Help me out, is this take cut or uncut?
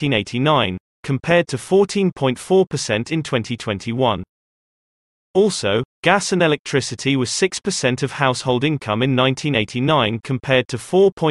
uncut